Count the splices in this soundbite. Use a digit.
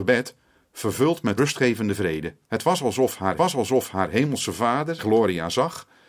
4